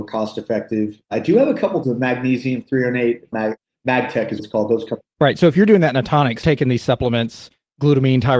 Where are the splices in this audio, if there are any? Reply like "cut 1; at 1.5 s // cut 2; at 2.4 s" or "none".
cut 1; at 1.8 s // cut 2; at 3.3 s // cut 3; at 4.4 s // cut 4; at 6.4 s